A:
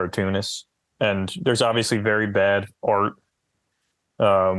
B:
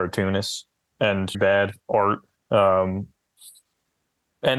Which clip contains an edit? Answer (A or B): B